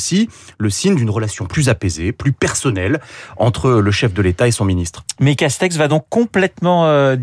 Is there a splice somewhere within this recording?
no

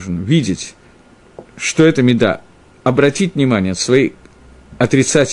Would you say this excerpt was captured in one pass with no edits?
yes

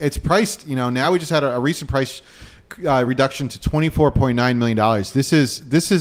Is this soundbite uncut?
yes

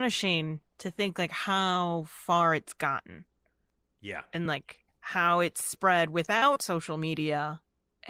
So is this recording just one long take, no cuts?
yes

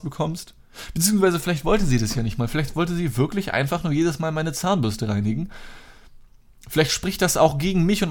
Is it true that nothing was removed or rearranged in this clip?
yes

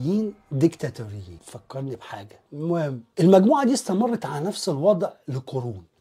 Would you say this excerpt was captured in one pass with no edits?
no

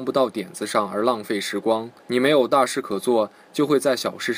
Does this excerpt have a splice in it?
yes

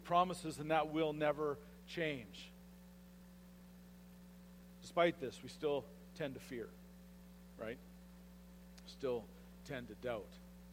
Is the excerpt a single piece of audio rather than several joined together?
yes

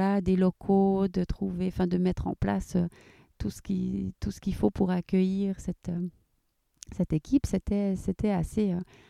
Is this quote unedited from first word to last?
yes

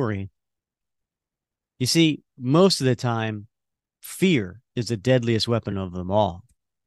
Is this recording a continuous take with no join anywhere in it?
yes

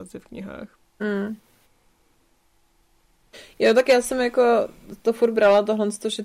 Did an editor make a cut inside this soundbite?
no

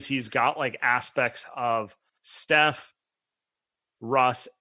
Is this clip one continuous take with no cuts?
yes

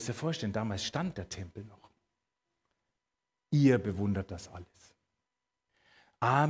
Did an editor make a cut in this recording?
no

